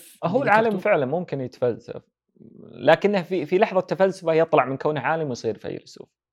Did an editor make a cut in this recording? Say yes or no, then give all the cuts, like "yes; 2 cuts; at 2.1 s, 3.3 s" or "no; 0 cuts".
no; 0 cuts